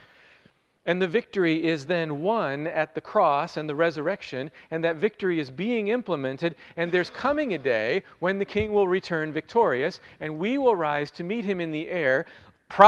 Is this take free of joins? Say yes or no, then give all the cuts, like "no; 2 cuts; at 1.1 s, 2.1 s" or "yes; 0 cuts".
yes; 0 cuts